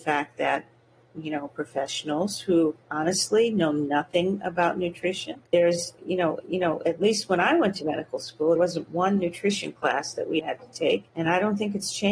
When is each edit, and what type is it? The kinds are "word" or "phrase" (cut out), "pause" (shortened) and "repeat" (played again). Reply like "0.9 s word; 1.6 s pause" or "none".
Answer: 1.5 s word; 2.8 s pause; 5.5 s pause; 6.4 s repeat; 8.6 s word; 10.4 s word; 11.1 s pause